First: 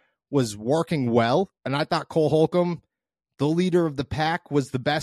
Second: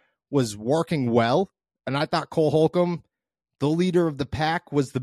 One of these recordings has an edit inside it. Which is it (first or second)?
first